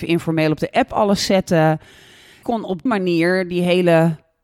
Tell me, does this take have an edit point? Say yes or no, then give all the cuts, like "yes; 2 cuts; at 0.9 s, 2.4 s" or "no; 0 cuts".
yes; 2 cuts; at 2.4 s, 2.9 s